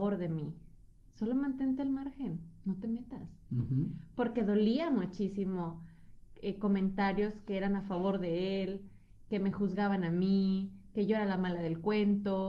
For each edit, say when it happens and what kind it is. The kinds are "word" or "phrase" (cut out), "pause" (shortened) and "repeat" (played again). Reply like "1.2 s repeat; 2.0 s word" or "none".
none